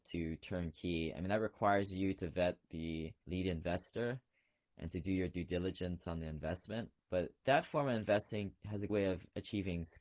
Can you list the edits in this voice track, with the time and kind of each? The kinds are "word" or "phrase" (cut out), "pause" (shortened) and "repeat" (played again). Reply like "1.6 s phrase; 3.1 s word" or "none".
8.9 s word